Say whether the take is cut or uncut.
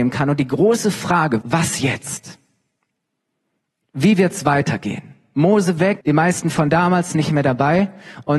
cut